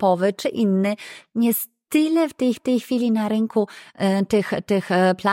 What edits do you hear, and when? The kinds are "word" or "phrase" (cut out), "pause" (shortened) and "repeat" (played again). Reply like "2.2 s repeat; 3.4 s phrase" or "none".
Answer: 2.6 s repeat